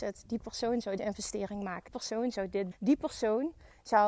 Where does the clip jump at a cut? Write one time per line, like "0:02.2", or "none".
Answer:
0:01.0
0:01.9
0:02.7